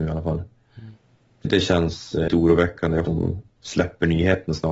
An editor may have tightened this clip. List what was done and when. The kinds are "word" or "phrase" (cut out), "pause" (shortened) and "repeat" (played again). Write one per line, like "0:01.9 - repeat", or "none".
0:01.4 - word
0:02.3 - word
0:03.0 - word